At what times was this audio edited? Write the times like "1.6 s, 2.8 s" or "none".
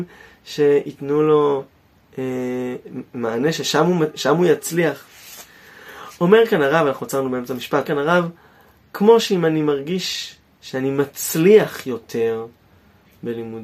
7.9 s